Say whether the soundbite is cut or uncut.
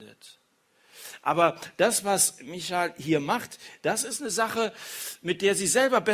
uncut